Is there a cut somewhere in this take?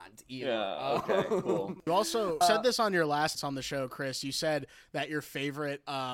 yes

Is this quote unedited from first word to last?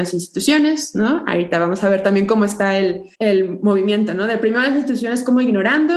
no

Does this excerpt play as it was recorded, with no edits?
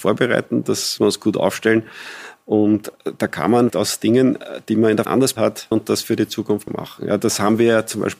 no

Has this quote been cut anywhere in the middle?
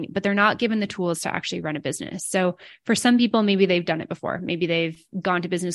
no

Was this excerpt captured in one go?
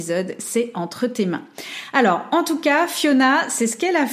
yes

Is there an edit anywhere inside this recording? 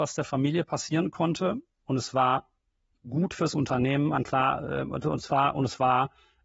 no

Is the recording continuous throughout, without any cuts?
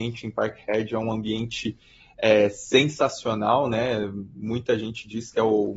yes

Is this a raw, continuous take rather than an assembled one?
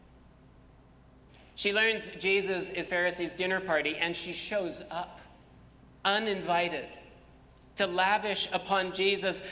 no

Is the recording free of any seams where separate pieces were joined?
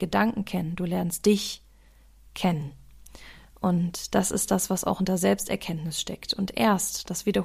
yes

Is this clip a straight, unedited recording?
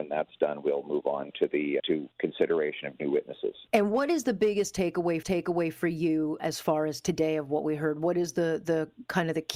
no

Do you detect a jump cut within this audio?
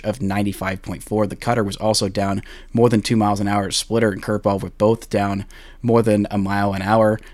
no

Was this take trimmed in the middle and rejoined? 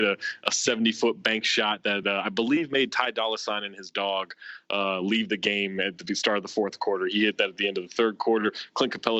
no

